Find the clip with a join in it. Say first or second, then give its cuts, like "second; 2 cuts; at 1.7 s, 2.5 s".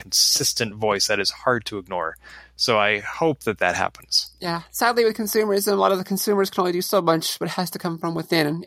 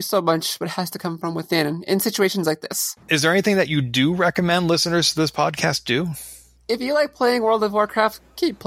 second; 1 cut; at 3.0 s